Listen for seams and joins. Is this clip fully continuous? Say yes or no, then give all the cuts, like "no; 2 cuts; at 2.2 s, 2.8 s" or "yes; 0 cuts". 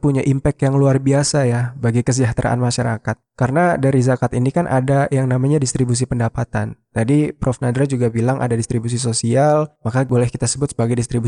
yes; 0 cuts